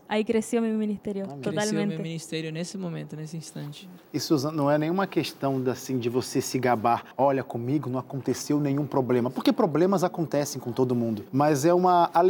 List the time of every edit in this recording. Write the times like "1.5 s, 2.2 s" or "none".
4.0 s, 7.1 s, 11.3 s